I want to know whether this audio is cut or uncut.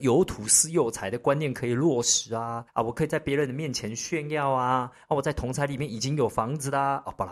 cut